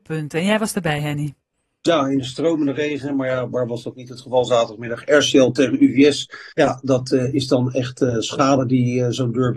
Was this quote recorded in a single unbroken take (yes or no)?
no